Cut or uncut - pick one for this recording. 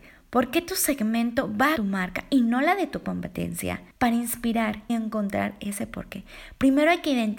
cut